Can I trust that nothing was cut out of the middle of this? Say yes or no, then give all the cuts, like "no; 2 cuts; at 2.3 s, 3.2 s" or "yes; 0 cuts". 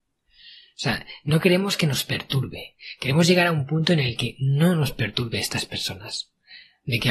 yes; 0 cuts